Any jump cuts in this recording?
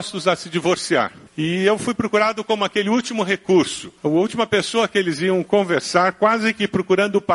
yes; 2 cuts; at 1.3 s, 4.0 s

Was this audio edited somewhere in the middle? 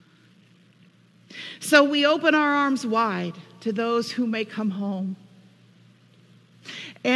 no; 0 cuts

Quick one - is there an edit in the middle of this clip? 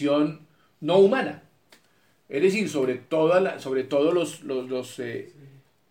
no; 0 cuts

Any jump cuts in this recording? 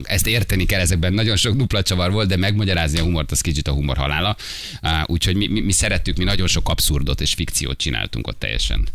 no; 0 cuts

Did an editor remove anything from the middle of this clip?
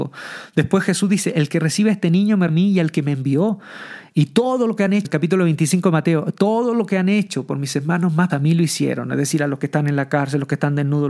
yes; 3 cuts; at 2.5 s, 5.0 s, 8.3 s

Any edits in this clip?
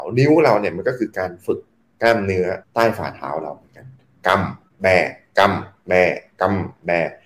yes; 1 cut; at 2.6 s

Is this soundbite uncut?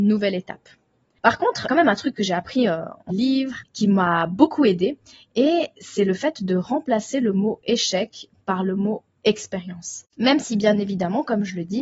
no; 3 cuts; at 1.7 s, 3.1 s, 10.1 s

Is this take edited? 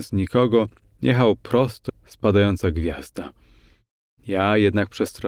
yes; 1 cut; at 1.9 s

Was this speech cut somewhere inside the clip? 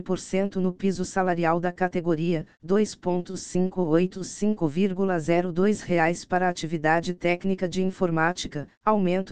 no; 0 cuts

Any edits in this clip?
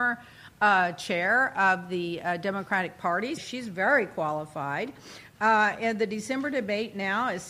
yes; 1 cut; at 3.4 s

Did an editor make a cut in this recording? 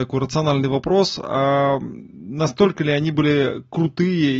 no; 0 cuts

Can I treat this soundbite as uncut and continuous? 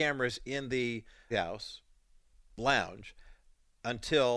no; 1 cut; at 1.3 s

